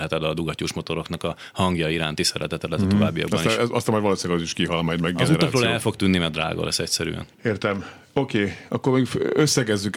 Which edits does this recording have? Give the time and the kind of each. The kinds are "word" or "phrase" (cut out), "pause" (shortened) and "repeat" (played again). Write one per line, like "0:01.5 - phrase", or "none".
0:07.3 - pause